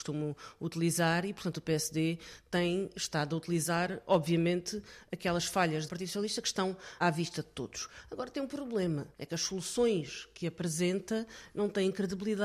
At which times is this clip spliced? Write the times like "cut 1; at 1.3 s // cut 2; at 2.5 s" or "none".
cut 1; at 5.9 s // cut 2; at 7.0 s // cut 3; at 9.1 s